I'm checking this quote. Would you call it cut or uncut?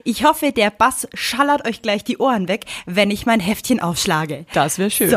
uncut